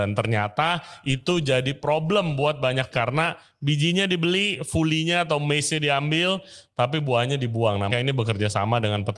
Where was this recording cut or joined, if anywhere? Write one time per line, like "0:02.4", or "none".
0:02.9
0:07.9